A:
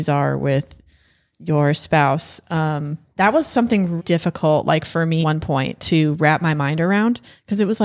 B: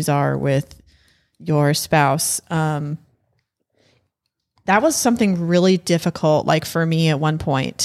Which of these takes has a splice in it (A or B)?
A